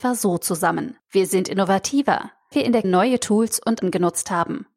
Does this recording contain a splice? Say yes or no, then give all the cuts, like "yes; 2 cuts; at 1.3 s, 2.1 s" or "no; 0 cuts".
yes; 4 cuts; at 1.0 s, 2.5 s, 2.8 s, 3.8 s